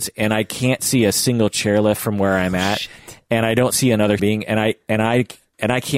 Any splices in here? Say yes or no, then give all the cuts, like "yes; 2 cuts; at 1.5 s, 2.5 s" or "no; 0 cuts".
yes; 1 cut; at 4.2 s